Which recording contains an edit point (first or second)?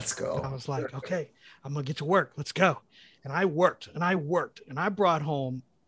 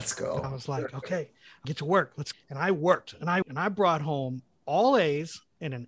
second